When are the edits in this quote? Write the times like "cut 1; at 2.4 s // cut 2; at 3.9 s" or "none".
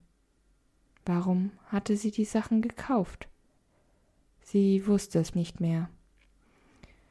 cut 1; at 5.3 s

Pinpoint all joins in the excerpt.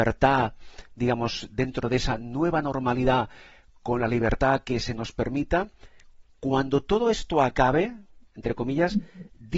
none

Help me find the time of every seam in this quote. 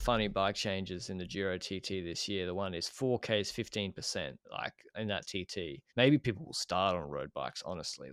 cut 1; at 4.4 s // cut 2; at 5.9 s

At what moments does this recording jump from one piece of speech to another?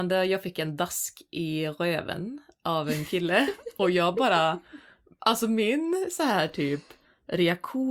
none

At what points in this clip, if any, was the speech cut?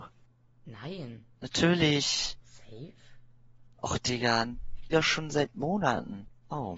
cut 1; at 1.3 s // cut 2; at 4.9 s

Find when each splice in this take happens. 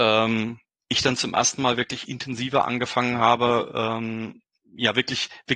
none

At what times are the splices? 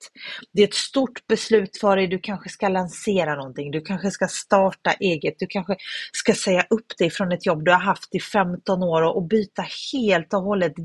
none

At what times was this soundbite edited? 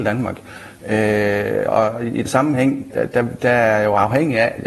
cut 1; at 1.7 s // cut 2; at 2.2 s // cut 3; at 2.9 s

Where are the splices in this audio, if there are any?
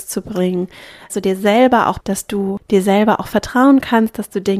cut 1; at 1.1 s // cut 2; at 2.0 s

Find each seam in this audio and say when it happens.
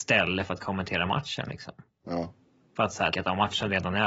cut 1; at 3.1 s

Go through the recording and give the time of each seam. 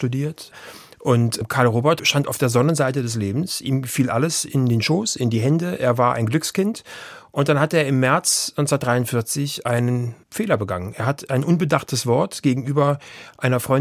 cut 1; at 10.2 s

